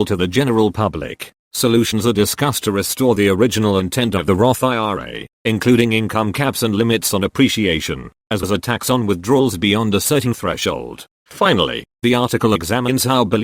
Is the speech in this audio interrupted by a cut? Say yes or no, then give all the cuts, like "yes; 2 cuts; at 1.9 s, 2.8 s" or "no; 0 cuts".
yes; 1 cut; at 8.4 s